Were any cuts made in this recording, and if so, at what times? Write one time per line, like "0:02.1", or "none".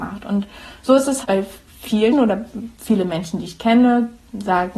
0:01.2
0:02.1
0:02.7